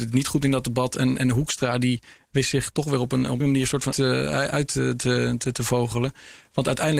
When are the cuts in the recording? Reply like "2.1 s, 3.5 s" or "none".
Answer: 3.4 s, 3.9 s